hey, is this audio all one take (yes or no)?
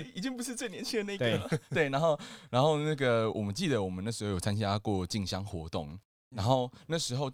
yes